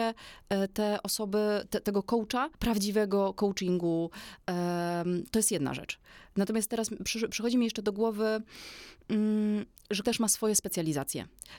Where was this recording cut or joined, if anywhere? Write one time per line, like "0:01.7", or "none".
0:02.5
0:10.0